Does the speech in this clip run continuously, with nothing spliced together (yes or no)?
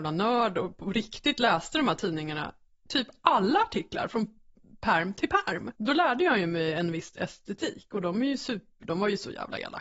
no